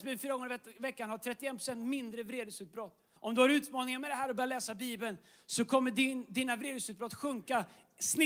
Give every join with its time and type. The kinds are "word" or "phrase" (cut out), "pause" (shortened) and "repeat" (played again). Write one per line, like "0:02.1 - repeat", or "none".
0:03.2 - pause